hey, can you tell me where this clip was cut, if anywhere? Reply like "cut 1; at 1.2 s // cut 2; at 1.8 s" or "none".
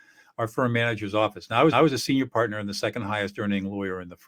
cut 1; at 1.7 s